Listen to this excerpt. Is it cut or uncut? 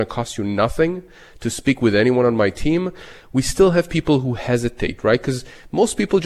uncut